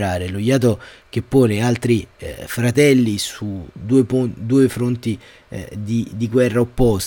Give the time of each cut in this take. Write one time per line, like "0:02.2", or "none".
none